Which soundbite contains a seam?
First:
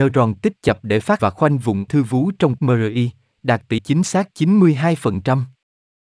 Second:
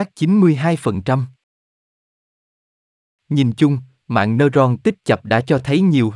first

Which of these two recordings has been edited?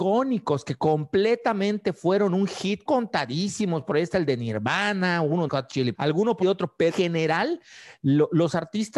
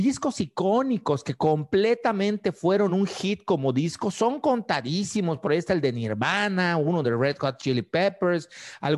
first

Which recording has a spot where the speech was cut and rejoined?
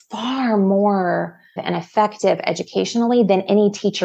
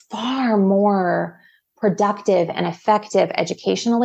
first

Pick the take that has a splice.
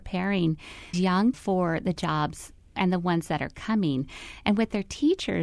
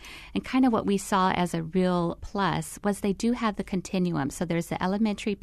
first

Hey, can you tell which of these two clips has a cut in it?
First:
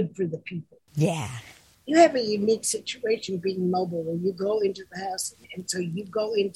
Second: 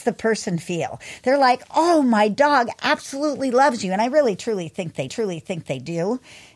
second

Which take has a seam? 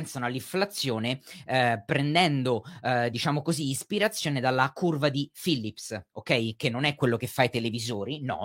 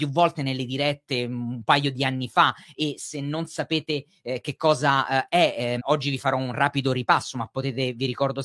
second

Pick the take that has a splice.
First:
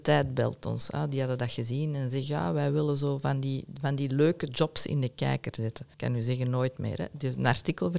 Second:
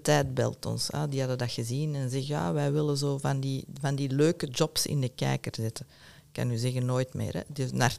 first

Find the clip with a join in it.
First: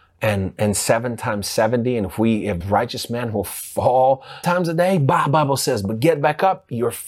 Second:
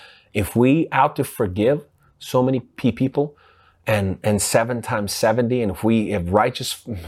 first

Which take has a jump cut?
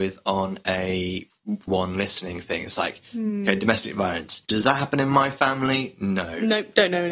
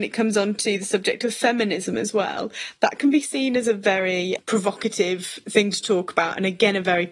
first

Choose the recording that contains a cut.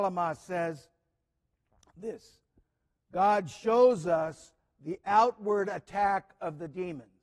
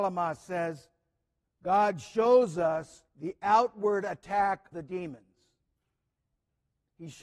second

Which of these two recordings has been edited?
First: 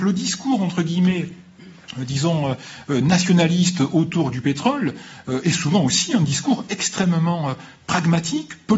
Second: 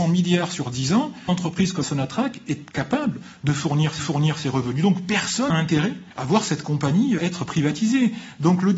second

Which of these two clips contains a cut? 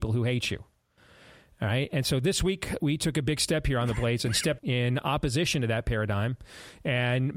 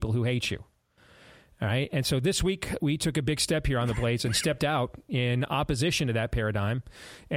first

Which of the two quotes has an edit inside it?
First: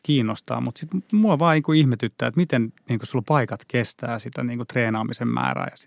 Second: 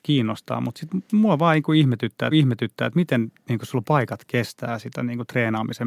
second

